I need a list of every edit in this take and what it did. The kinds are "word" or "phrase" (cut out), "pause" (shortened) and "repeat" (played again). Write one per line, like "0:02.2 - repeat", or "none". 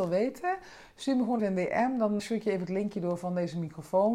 0:01.4 - word
0:02.2 - word